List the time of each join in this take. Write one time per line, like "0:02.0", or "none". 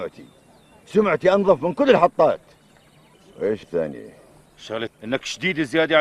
0:03.6
0:04.9